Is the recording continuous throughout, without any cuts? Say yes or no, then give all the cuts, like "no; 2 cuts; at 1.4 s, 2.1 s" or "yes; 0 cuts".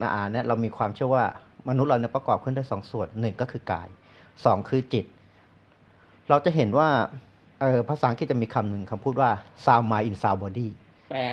yes; 0 cuts